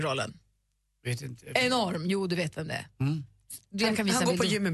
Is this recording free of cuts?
yes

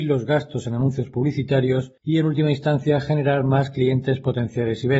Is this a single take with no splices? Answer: no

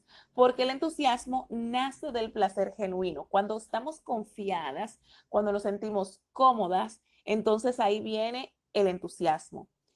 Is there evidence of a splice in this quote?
no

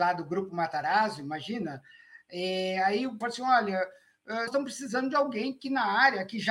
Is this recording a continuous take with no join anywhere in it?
no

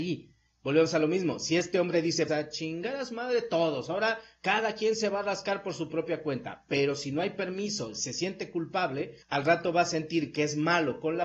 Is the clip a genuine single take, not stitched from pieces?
no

